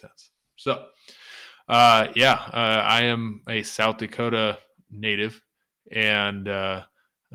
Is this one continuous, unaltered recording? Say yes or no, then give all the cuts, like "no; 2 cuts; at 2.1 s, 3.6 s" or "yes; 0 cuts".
yes; 0 cuts